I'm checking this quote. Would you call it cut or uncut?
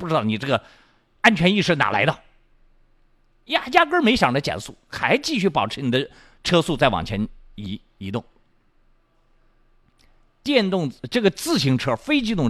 uncut